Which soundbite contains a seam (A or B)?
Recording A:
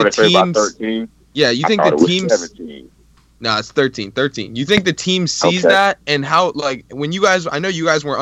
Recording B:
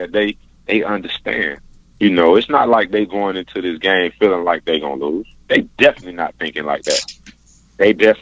B